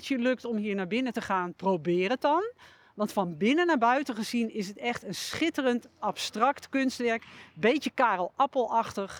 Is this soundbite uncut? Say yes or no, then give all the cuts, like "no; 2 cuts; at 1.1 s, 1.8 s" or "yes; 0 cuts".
yes; 0 cuts